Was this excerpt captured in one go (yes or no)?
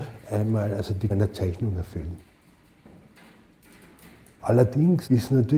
no